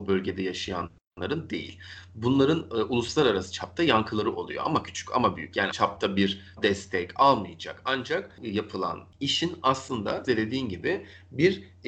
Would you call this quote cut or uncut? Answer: cut